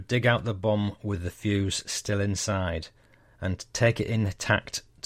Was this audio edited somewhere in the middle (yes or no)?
no